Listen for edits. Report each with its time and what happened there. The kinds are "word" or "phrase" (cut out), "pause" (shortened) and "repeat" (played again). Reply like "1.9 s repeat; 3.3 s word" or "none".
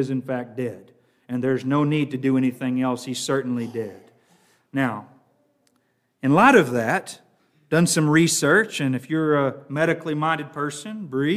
none

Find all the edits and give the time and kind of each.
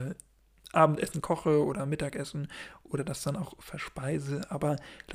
none

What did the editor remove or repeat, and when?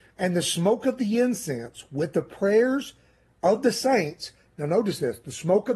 none

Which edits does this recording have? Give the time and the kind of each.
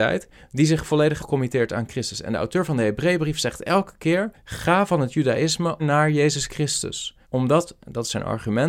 1.2 s word; 4.3 s pause; 5.8 s word; 7.2 s pause

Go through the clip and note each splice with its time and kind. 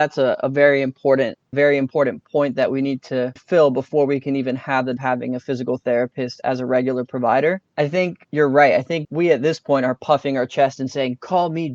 1.5 s phrase; 3.4 s word; 5.0 s phrase; 9.0 s word

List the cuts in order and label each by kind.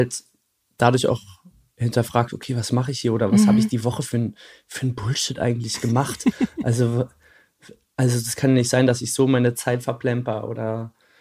none

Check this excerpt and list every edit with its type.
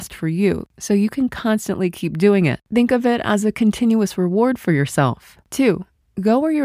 5.4 s pause

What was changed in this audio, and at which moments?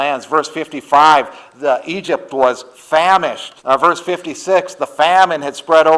3.6 s pause

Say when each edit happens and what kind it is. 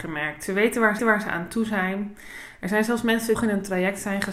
1.0 s repeat; 3.3 s phrase

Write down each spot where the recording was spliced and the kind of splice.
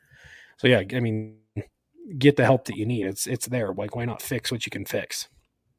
none

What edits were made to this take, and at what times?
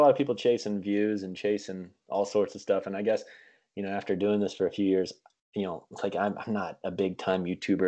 none

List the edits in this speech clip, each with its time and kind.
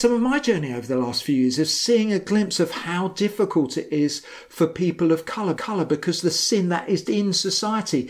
5.6 s repeat; 7.1 s word

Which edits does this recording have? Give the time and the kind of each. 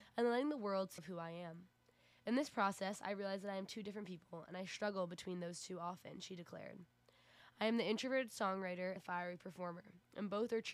1.0 s word; 9.0 s word

